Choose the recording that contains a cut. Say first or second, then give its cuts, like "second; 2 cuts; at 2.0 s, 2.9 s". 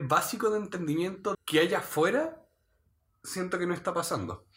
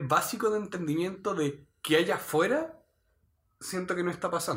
first; 1 cut; at 1.3 s